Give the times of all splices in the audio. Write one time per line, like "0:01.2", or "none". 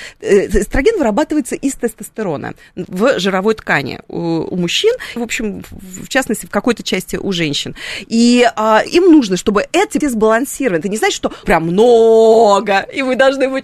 0:04.0
0:05.2
0:08.9
0:10.0
0:11.4